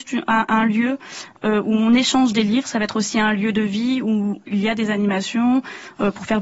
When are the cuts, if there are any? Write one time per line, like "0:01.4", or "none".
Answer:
none

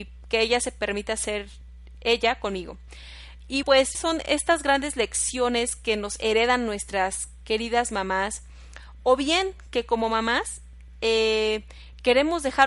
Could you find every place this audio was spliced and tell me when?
0:03.6
0:03.9

